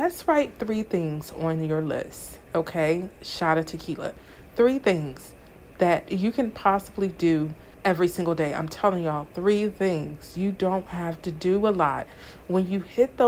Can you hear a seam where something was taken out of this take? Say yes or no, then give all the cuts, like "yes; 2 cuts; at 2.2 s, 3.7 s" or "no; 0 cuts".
yes; 1 cut; at 7.7 s